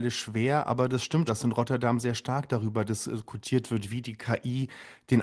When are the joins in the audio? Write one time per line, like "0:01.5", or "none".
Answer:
0:01.3